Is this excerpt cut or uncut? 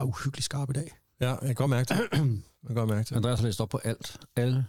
uncut